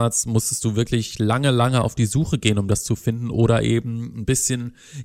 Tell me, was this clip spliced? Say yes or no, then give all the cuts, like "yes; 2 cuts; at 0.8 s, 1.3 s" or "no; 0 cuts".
no; 0 cuts